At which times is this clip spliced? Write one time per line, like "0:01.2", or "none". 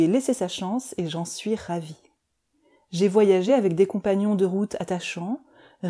none